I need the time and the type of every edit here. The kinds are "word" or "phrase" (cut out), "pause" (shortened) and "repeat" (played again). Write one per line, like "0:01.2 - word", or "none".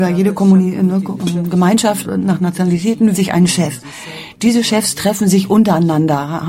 0:02.0 - word
0:03.1 - word